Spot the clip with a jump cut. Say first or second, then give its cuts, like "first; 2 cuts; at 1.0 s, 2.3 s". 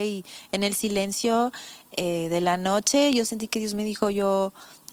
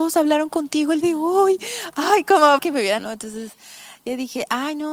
second; 3 cuts; at 1.0 s, 2.6 s, 3.0 s